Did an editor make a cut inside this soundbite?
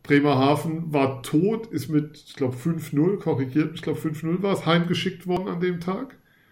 no; 0 cuts

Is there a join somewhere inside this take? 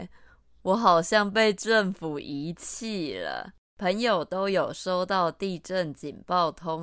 yes; 1 cut; at 3.6 s

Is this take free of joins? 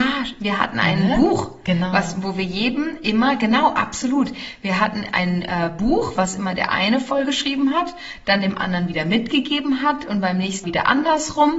no; 1 cut; at 10.6 s

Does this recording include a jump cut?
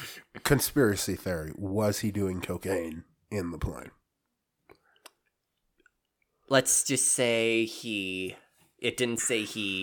no; 0 cuts

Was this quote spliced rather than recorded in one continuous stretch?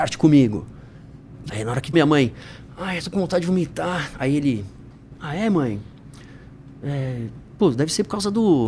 yes; 3 cuts; at 1.5 s, 1.9 s, 3.0 s

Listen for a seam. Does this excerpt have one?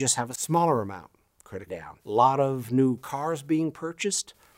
yes; 2 cuts; at 1.7 s, 2.0 s

